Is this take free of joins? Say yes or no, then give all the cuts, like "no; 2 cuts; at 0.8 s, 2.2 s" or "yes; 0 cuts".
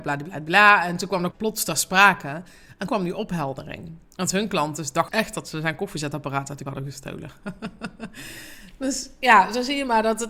no; 4 cuts; at 1.3 s, 2.9 s, 5.1 s, 6.7 s